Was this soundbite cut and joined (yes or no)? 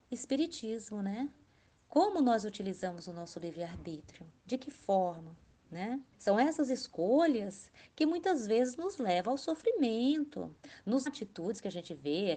yes